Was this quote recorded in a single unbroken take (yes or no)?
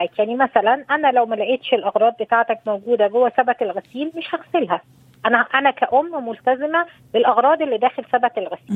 yes